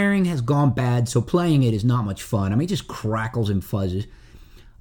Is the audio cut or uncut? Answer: uncut